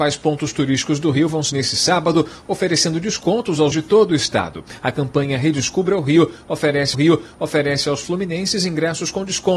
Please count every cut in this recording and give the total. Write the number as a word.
three